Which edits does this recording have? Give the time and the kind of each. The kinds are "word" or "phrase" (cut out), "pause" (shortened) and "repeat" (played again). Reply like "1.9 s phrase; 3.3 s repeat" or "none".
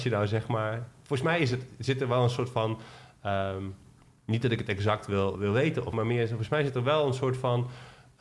5.3 s word; 5.9 s word